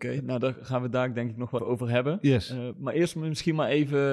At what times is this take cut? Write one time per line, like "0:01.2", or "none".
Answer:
0:01.6